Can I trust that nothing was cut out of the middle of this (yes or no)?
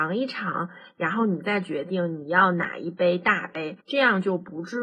no